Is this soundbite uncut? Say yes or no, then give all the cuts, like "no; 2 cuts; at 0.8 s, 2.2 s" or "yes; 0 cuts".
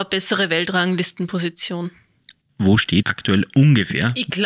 no; 2 cuts; at 2.5 s, 3.0 s